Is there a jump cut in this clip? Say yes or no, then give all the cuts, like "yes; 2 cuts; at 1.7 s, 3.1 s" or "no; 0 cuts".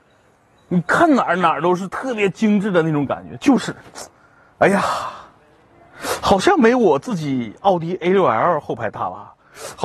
no; 0 cuts